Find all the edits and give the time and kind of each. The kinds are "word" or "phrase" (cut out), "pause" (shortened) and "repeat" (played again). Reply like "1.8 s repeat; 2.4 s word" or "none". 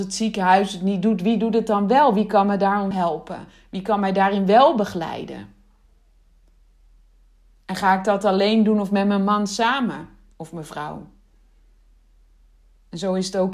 2.9 s word